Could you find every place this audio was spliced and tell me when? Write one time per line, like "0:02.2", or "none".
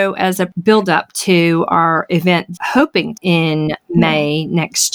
0:02.6
0:03.2